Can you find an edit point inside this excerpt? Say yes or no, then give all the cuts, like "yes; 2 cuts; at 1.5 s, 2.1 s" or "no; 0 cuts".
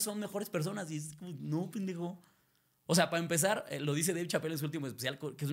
no; 0 cuts